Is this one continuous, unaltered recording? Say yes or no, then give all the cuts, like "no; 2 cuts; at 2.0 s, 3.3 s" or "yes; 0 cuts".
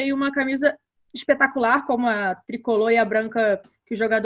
yes; 0 cuts